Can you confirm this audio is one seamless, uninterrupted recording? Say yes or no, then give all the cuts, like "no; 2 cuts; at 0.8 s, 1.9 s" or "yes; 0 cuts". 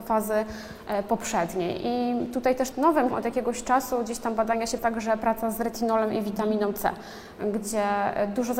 no; 3 cuts; at 2.7 s, 3.1 s, 4.8 s